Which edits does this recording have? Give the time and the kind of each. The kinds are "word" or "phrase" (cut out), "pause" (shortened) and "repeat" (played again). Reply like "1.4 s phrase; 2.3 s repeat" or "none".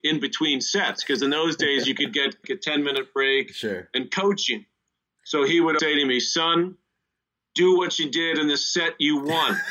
2.4 s word; 5.8 s word